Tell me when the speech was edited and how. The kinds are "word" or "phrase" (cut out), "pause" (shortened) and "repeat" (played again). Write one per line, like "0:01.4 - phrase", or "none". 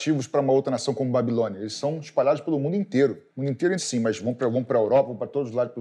0:03.3 - pause
0:03.8 - phrase